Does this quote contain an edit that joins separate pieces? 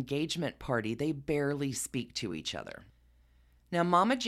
no; 0 cuts

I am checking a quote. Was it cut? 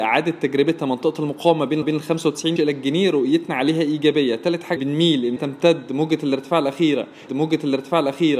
yes; 5 cuts; at 1.8 s, 2.6 s, 4.8 s, 5.4 s, 7.3 s

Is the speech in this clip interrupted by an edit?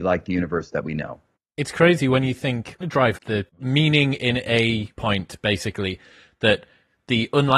yes; 5 cuts; at 1.4 s, 2.8 s, 3.2 s, 3.5 s, 4.9 s

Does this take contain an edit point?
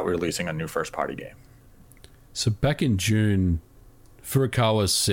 no; 0 cuts

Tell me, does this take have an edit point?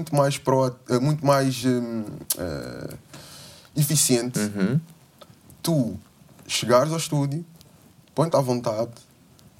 no; 0 cuts

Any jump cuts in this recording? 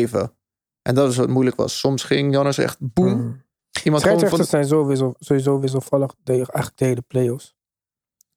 no; 0 cuts

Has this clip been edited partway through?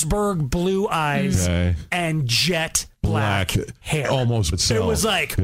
yes; 2 cuts; at 2.9 s, 4.5 s

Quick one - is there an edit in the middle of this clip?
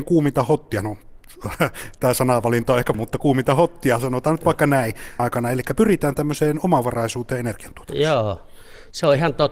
yes; 2 cuts; at 2.9 s, 5.2 s

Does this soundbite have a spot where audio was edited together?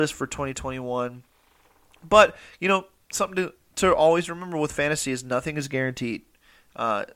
no; 0 cuts

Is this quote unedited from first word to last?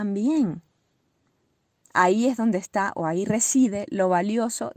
yes; 0 cuts

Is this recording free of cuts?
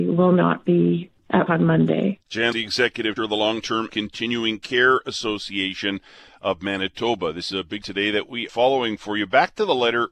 no; 7 cuts; at 1.5 s, 2.5 s, 3.2 s, 3.9 s, 7.5 s, 7.8 s, 8.5 s

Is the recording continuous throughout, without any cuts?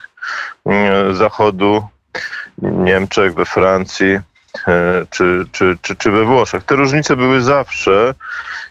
yes; 0 cuts

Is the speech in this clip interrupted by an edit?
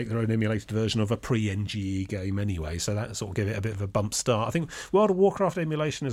no; 0 cuts

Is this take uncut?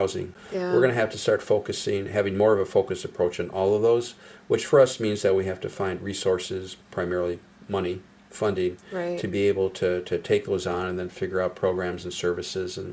yes; 0 cuts

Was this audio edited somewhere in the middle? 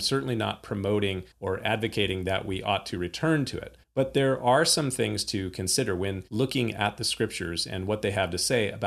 yes; 3 cuts; at 1.3 s, 3.8 s, 6.3 s

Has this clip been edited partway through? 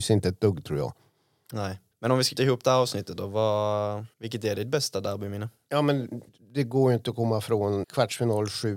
yes; 5 cuts; at 1.9 s, 2.3 s, 4.1 s, 6.3 s, 7.8 s

